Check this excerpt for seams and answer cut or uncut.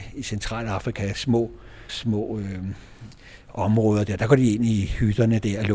cut